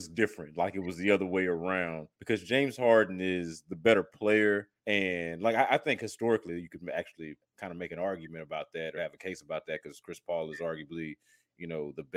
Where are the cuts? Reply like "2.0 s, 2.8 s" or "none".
2.1 s, 4.8 s, 7.4 s, 9.0 s